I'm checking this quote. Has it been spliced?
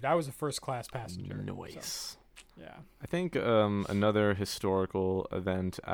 yes; 1 cut; at 2.5 s

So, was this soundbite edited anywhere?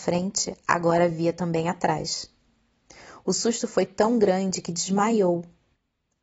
no; 0 cuts

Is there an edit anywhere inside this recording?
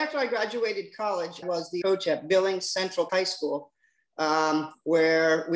yes; 3 cuts; at 1.4 s, 1.8 s, 3.1 s

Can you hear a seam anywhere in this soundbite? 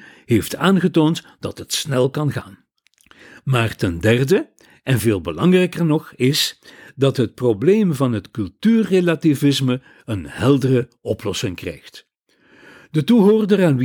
no; 0 cuts

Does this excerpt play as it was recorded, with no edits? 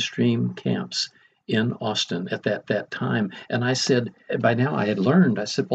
no; 2 cuts; at 2.7 s, 4.3 s

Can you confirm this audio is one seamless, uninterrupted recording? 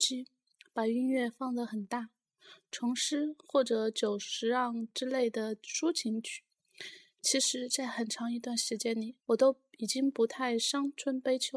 no; 1 cut; at 9.2 s

